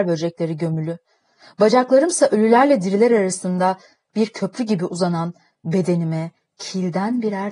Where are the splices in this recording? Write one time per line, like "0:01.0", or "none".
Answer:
none